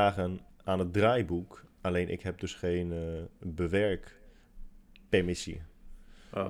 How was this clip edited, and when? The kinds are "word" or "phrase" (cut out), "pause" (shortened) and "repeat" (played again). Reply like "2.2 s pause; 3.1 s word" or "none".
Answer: none

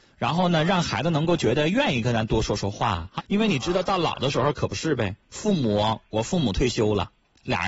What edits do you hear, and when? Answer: 3.2 s word; 5.2 s pause

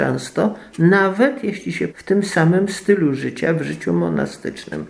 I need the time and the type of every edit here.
1.9 s word

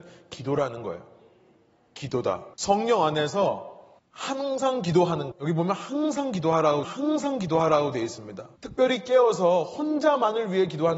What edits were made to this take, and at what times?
2.5 s pause; 4.0 s pause; 5.3 s word; 6.8 s repeat; 8.6 s pause

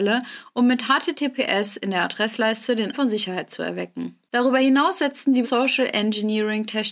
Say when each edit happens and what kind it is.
2.9 s word; 5.4 s word

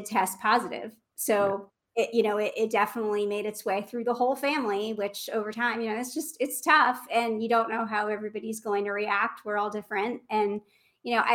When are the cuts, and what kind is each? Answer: none

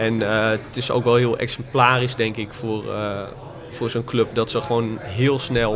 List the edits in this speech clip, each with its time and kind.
none

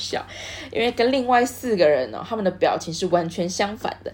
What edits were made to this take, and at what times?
none

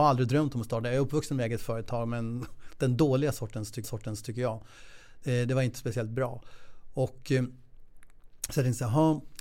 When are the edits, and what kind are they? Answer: 3.8 s repeat

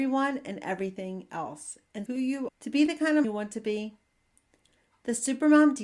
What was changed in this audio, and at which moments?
2.1 s word; 2.5 s word; 3.2 s word

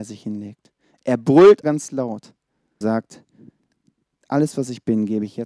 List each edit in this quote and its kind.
1.6 s word; 2.8 s word

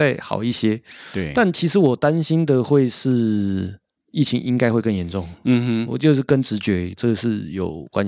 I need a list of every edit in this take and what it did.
4.0 s pause

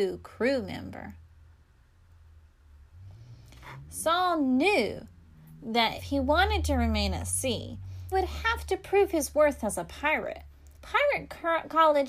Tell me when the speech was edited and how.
6.0 s word; 8.1 s word; 10.7 s pause

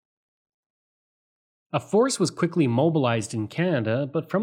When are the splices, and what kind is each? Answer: none

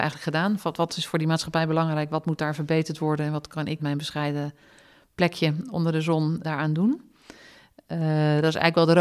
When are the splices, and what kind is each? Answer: 3.8 s word; 6.4 s word

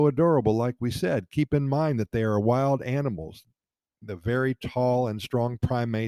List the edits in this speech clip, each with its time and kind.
none

